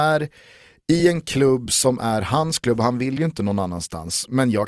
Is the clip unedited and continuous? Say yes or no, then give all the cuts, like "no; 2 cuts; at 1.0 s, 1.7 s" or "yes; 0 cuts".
yes; 0 cuts